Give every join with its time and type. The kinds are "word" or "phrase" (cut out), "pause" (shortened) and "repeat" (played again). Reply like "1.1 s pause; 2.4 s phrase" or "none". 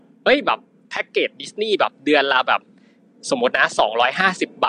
none